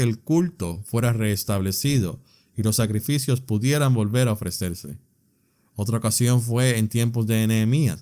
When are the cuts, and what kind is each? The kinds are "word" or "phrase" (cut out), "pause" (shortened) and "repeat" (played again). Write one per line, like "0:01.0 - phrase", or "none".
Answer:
none